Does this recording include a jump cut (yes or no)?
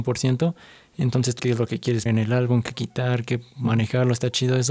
yes